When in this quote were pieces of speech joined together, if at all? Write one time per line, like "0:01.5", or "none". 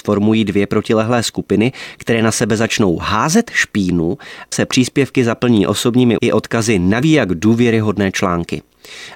0:04.5
0:06.2
0:07.0